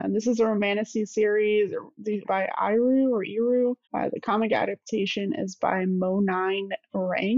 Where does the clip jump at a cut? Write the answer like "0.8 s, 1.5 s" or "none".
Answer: 2.2 s, 3.8 s